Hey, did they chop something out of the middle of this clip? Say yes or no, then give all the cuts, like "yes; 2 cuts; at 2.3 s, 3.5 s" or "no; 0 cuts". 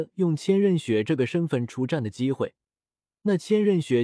no; 0 cuts